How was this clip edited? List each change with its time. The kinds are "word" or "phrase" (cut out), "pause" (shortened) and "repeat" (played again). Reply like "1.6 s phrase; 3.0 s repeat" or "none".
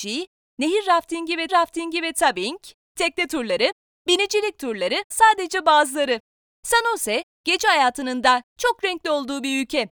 1.5 s repeat; 5.1 s word